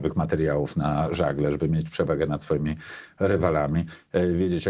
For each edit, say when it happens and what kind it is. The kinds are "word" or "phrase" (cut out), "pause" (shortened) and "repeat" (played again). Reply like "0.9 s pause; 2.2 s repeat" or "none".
none